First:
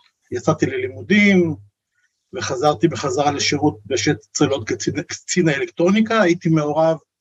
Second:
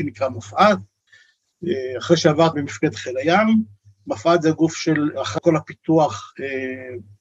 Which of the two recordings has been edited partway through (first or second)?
second